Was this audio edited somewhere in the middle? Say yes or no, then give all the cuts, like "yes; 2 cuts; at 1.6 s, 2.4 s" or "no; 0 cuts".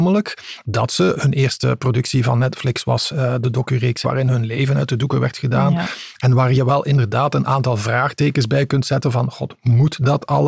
yes; 1 cut; at 4.0 s